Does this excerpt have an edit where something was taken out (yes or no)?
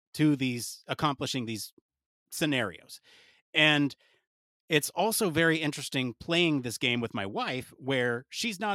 no